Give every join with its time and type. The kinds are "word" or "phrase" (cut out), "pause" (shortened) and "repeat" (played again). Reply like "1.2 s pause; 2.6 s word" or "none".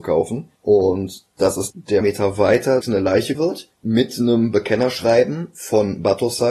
1.7 s word; 2.0 s phrase; 2.8 s word; 3.3 s word; 3.7 s pause